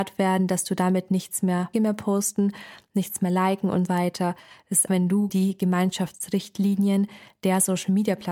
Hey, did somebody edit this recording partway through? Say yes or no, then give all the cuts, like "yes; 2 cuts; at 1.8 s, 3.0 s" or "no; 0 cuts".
yes; 4 cuts; at 1.7 s, 3.9 s, 4.9 s, 5.3 s